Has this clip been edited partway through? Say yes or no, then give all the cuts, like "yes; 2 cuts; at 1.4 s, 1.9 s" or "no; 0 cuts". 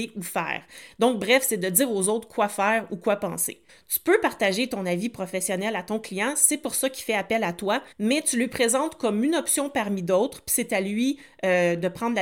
yes; 2 cuts; at 3.7 s, 7.9 s